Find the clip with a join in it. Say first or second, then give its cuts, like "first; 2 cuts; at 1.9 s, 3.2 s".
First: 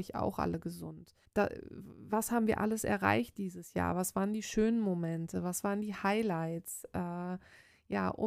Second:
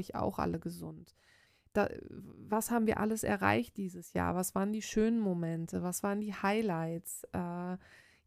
first; 1 cut; at 1.2 s